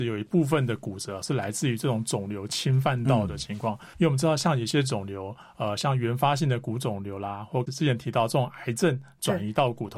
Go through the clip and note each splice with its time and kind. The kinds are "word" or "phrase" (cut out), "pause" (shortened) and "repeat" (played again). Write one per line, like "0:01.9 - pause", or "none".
0:03.9 - pause